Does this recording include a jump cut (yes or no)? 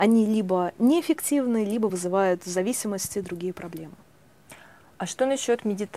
no